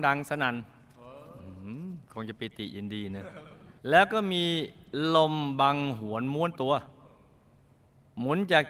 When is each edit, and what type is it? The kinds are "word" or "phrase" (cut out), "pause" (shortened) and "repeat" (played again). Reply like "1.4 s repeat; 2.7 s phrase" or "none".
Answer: 3.8 s pause

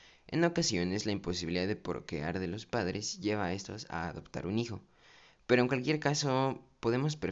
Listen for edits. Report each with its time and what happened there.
none

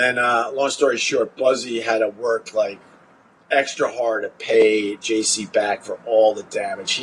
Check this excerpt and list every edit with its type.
none

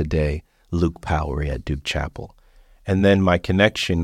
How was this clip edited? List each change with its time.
none

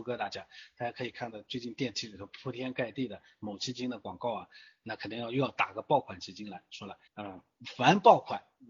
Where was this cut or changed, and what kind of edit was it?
7.1 s pause

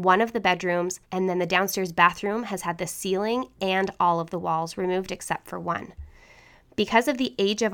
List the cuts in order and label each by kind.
1.0 s pause

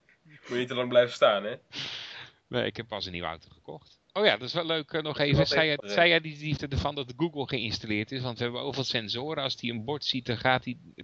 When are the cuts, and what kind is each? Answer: 4.1 s pause; 5.8 s word; 6.6 s word

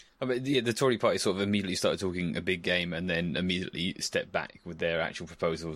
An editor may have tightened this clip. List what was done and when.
none

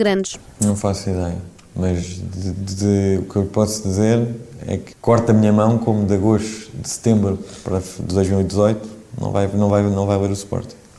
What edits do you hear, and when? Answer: none

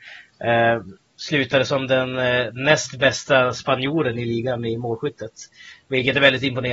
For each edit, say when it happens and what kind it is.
none

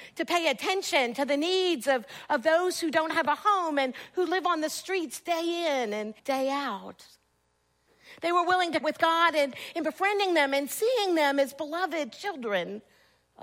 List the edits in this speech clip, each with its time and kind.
6.2 s pause; 8.8 s word

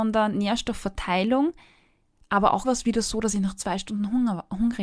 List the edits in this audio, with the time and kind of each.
2.6 s word

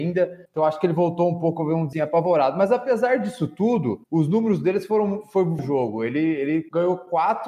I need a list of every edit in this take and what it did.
1.9 s word; 5.6 s phrase

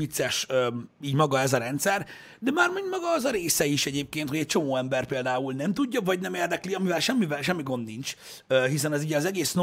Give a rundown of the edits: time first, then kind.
none

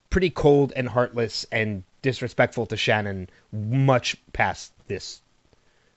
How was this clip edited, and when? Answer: none

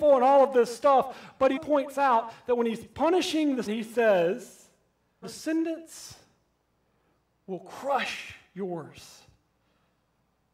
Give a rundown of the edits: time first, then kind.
1.6 s word; 3.7 s word; 5.2 s word

